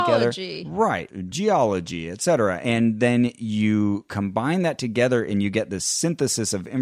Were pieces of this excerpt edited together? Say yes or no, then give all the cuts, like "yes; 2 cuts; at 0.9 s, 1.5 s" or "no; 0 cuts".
no; 0 cuts